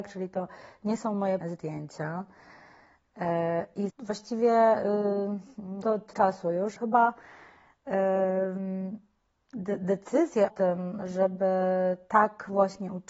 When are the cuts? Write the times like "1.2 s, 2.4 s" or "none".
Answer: 1.4 s, 3.9 s, 5.8 s, 6.1 s, 6.8 s, 10.5 s